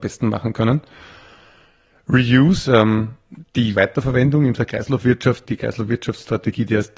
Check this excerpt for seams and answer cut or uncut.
cut